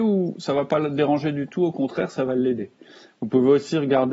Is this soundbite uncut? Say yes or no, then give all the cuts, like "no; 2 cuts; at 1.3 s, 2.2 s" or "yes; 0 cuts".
yes; 0 cuts